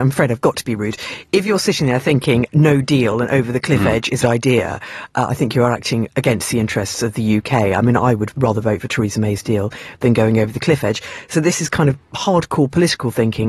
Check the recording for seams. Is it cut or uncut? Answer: cut